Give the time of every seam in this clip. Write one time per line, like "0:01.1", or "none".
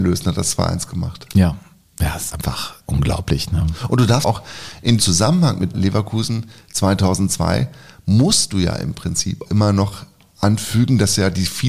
0:02.3
0:02.8
0:04.2
0:05.0
0:05.7
0:09.5